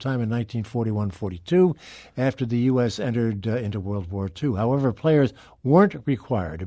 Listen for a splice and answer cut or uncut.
uncut